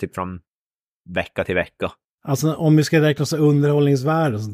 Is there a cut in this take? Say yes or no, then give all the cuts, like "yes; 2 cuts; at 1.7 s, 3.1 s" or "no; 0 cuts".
no; 0 cuts